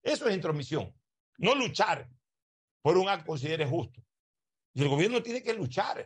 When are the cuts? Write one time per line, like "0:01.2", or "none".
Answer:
0:03.3